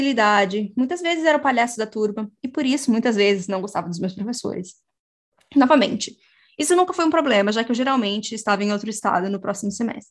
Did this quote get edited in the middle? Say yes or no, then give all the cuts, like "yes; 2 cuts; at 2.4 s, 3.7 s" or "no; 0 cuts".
no; 0 cuts